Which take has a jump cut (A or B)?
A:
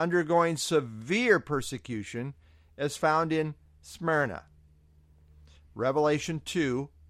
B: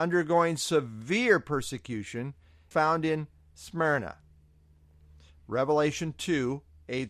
B